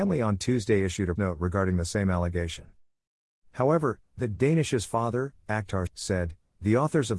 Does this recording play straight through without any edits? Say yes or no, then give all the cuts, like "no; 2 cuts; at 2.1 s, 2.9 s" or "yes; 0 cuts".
no; 2 cuts; at 1.2 s, 5.9 s